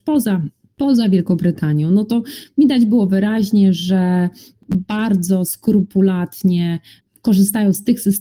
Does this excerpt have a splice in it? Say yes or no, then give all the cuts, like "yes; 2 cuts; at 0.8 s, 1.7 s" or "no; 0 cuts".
no; 0 cuts